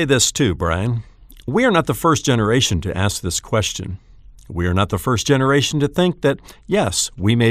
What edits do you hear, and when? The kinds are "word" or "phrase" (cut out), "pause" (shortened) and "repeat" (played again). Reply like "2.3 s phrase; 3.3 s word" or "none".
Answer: none